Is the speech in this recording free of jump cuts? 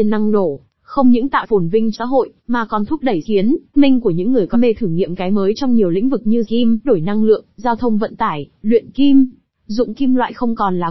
no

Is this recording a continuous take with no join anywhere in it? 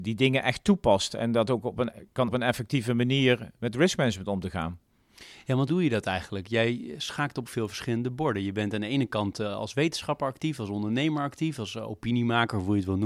no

